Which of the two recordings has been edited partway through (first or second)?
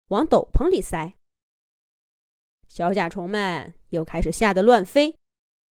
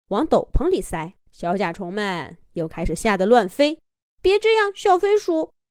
second